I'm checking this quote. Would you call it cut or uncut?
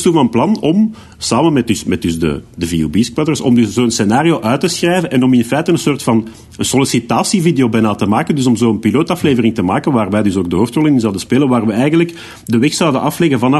uncut